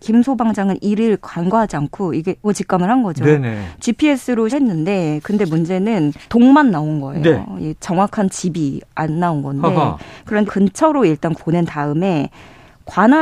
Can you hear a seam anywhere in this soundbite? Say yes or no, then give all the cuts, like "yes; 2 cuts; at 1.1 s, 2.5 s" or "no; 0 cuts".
yes; 5 cuts; at 2.4 s, 4.5 s, 6.3 s, 10.4 s, 11.4 s